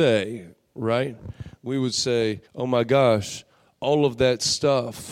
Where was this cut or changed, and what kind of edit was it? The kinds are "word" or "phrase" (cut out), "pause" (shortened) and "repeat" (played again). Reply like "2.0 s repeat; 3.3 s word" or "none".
2.5 s pause